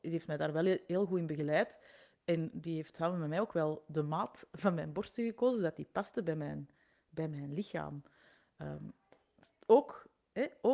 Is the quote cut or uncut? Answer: uncut